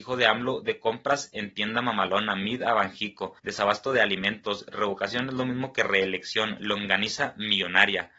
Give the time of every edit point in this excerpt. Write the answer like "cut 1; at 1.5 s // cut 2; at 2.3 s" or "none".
cut 1; at 3.4 s